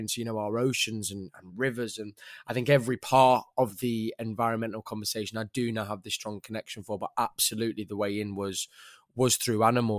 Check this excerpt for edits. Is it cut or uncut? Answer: uncut